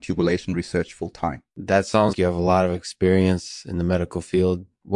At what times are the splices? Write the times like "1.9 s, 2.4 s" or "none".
1.5 s, 2.1 s